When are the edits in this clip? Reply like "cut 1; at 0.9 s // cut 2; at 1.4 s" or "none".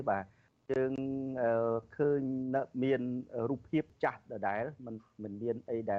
none